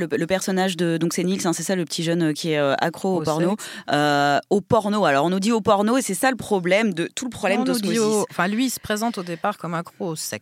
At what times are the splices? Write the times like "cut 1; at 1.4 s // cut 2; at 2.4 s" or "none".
none